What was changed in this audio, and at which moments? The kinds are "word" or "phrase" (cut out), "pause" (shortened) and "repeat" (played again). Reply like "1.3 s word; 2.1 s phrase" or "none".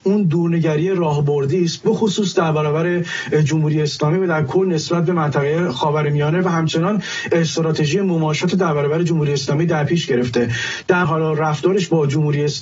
11.0 s phrase